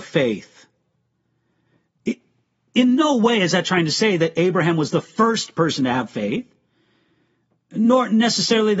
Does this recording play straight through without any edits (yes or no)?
yes